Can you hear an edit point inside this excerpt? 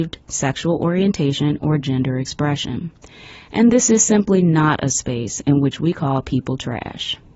no; 0 cuts

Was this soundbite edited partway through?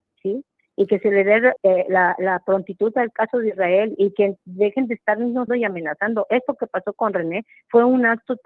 yes; 2 cuts; at 1.6 s, 5.5 s

